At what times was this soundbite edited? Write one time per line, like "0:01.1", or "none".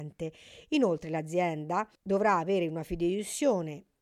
0:02.0